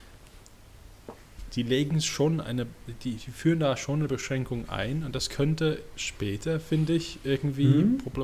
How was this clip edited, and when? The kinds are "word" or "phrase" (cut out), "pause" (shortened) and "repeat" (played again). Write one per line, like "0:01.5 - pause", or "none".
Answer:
none